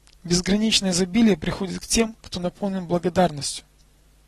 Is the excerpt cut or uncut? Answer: uncut